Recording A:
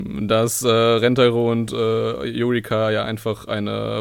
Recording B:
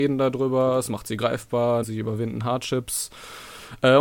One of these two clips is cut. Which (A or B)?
B